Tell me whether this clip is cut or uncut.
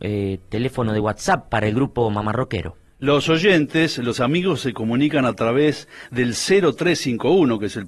uncut